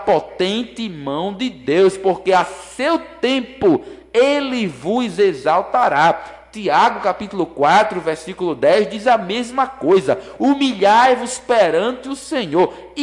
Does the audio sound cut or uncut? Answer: uncut